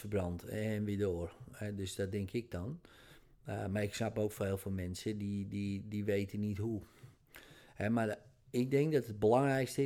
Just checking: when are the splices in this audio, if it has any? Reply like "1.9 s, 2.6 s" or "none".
none